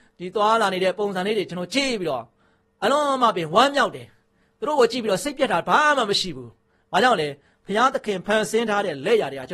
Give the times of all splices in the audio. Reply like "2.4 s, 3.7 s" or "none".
none